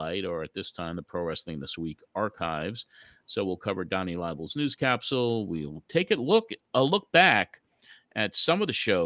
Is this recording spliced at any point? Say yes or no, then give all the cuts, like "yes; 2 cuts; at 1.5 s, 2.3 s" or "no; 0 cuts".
no; 0 cuts